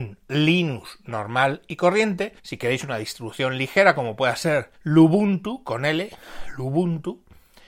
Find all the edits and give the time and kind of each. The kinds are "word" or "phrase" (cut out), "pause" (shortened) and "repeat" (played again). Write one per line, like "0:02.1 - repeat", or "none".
0:02.4 - pause
0:04.7 - pause